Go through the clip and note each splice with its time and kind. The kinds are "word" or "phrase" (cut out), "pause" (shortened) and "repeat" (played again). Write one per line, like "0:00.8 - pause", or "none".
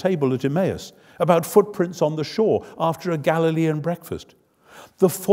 none